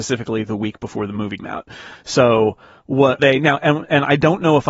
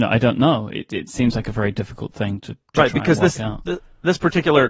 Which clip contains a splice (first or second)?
first